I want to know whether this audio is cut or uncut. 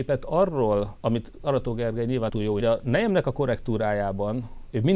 cut